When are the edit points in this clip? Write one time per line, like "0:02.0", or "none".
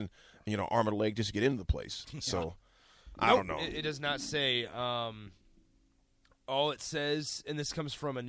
none